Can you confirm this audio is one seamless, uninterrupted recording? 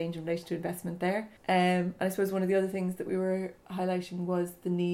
no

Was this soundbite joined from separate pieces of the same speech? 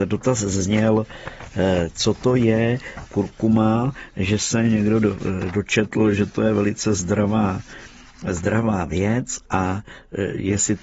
no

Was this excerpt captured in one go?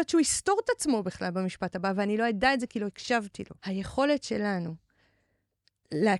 no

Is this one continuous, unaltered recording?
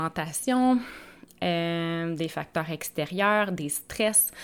yes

